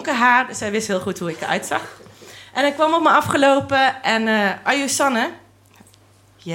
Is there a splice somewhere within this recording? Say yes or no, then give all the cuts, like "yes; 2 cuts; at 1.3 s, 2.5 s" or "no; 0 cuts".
no; 0 cuts